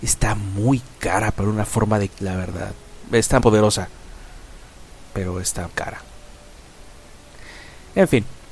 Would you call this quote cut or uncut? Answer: cut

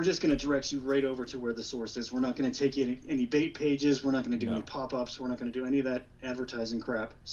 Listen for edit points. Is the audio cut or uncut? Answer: uncut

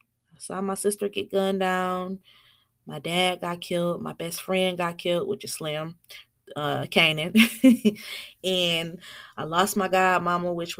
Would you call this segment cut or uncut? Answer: uncut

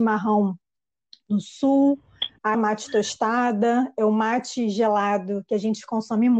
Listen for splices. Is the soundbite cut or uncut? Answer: cut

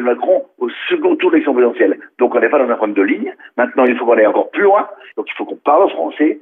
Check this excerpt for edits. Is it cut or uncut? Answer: uncut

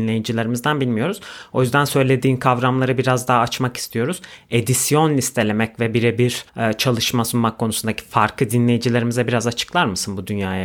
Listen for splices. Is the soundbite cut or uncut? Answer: cut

